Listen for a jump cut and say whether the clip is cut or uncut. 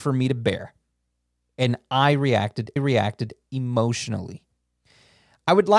cut